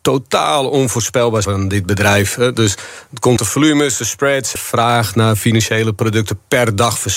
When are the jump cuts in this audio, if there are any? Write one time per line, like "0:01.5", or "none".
0:01.4
0:03.4
0:04.6